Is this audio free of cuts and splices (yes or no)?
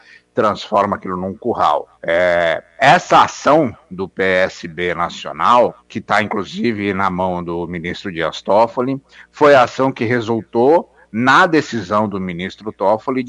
no